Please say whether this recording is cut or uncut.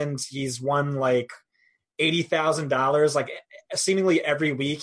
uncut